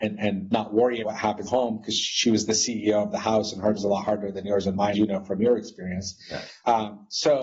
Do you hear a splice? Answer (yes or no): yes